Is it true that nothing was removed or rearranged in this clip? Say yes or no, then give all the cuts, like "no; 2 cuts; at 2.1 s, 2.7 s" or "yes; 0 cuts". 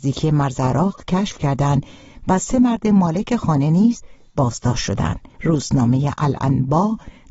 no; 1 cut; at 5.3 s